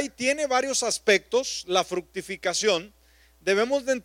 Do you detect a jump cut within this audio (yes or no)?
no